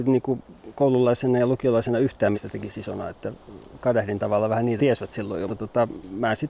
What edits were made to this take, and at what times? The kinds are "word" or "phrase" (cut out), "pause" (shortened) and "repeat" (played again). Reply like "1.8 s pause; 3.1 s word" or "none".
2.3 s word; 4.8 s word; 5.5 s word